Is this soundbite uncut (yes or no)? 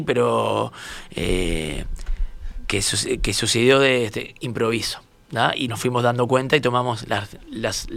no